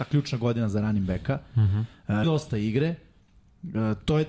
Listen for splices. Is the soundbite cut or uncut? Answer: cut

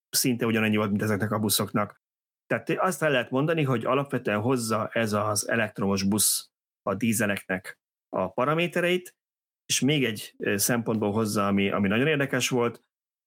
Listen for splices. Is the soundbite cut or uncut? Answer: uncut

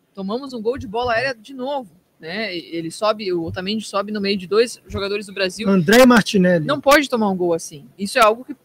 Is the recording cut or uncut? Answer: uncut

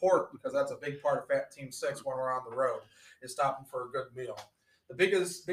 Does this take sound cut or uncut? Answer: uncut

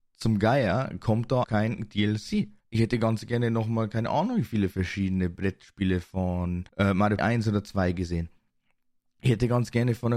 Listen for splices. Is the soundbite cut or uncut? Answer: cut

